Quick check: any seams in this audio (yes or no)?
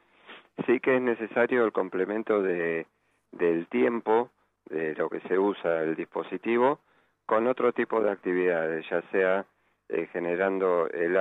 no